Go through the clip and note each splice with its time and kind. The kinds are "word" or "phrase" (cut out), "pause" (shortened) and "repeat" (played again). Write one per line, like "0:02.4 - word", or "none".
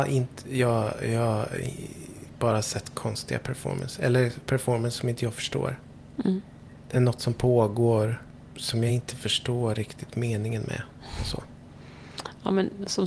none